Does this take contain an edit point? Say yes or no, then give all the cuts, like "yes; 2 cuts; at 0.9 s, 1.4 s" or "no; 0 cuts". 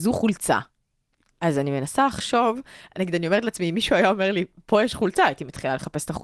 no; 0 cuts